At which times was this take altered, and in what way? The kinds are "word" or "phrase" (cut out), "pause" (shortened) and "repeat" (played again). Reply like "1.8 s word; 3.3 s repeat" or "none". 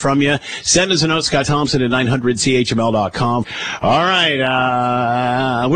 none

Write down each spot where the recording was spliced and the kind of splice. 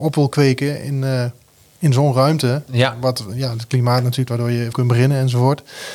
4.3 s word; 4.7 s word

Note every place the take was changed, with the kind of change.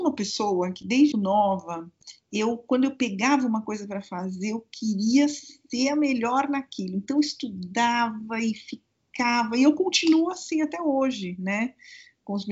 1.1 s word

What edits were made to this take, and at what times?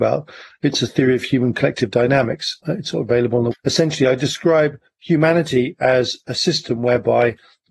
2.6 s word; 3.5 s word

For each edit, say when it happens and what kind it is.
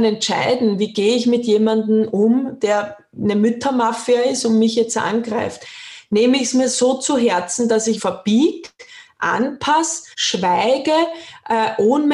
8.0 s word; 10.1 s pause

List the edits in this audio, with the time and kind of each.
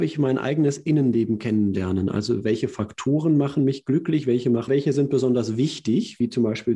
4.7 s phrase

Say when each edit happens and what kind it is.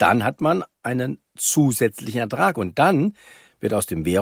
none

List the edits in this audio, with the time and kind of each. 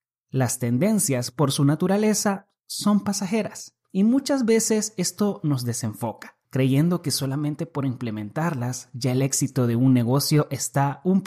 3.8 s pause; 6.4 s pause

